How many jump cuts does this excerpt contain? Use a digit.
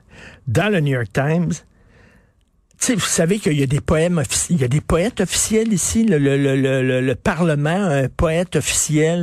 0